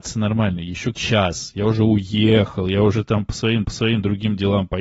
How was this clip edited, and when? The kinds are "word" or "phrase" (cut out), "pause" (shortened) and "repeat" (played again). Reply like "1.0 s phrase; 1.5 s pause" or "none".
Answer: 0.9 s word; 3.6 s repeat

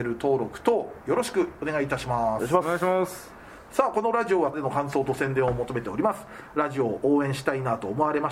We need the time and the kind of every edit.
4.5 s word

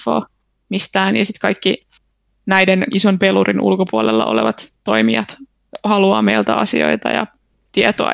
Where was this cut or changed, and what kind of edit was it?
2.9 s word

